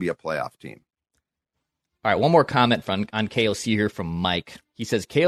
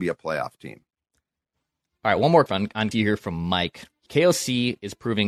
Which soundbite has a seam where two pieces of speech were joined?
second; 3 cuts; at 2.5 s, 2.9 s, 4.1 s

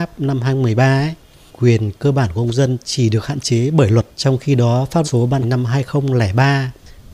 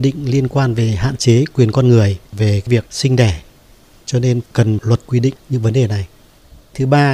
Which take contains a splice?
first; 4 cuts; at 1.5 s, 4.1 s, 5.0 s, 5.4 s

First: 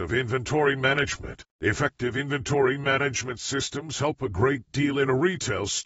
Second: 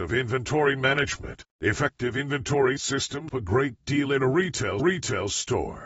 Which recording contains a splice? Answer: second; 3 cuts; at 2.8 s, 3.3 s, 4.8 s

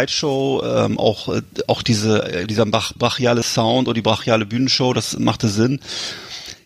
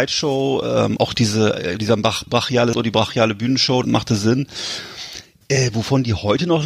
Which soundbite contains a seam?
second; 3 cuts; at 1.0 s, 2.7 s, 3.8 s

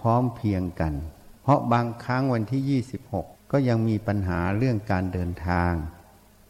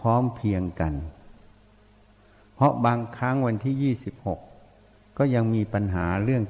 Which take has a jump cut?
first; 2 cuts; at 1.4 s, 3.3 s

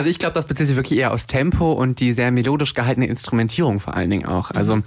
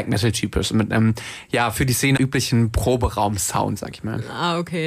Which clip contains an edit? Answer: second; 1 cut; at 2.2 s

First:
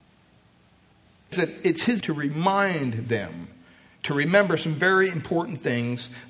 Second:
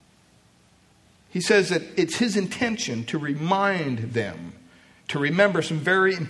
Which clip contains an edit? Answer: first; 2 cuts; at 1.3 s, 2.0 s

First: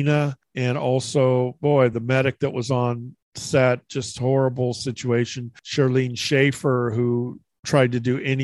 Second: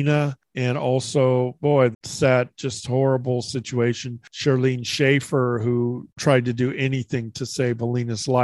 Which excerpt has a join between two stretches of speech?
second; 2 cuts; at 1.9 s, 6.1 s

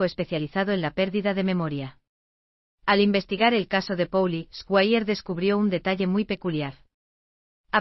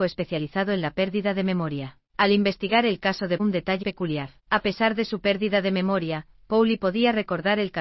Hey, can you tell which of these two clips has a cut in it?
second; 4 cuts; at 2.1 s, 3.4 s, 3.8 s, 4.4 s

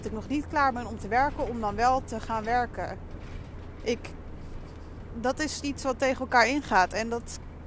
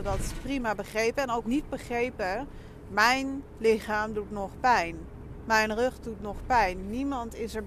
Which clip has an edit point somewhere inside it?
second; 1 cut; at 1.4 s

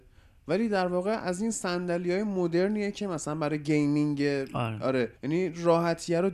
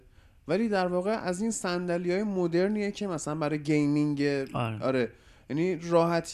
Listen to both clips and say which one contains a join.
first; 1 cut; at 5.2 s

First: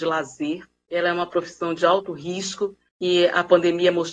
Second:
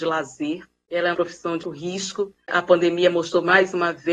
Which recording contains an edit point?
second; 3 cuts; at 1.1 s, 1.6 s, 2.5 s

